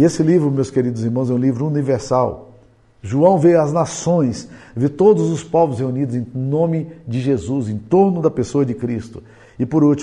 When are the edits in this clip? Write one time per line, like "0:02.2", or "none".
none